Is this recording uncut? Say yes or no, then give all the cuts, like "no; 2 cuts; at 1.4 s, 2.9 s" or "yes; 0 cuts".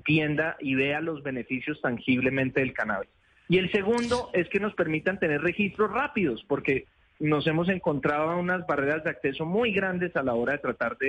yes; 0 cuts